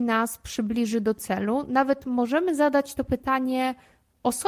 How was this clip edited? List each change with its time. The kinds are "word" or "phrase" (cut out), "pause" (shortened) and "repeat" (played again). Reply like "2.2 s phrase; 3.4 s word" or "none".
none